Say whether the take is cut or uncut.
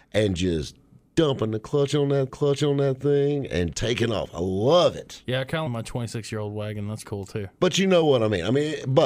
cut